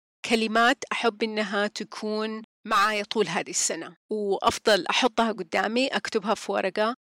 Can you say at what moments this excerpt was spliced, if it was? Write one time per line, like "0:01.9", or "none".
0:02.5
0:04.0